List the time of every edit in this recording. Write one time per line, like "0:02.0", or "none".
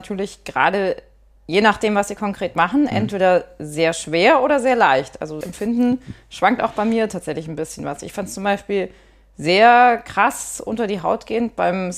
0:05.4